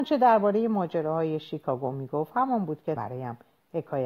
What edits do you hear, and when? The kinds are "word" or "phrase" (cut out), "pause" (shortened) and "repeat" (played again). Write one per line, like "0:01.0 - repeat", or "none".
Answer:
0:03.0 - word